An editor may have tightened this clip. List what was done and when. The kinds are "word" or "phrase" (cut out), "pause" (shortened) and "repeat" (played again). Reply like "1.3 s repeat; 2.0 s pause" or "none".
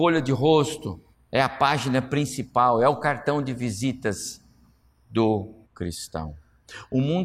1.1 s pause; 5.6 s pause